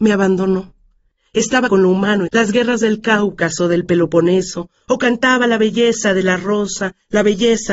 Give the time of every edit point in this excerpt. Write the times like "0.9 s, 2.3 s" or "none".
1.7 s, 2.3 s